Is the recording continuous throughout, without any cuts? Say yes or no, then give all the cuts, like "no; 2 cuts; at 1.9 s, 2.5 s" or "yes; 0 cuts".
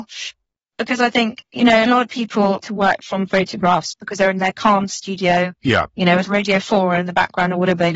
no; 1 cut; at 2.6 s